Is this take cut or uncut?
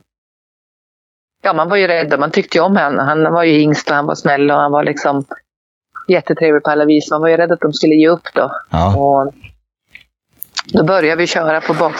uncut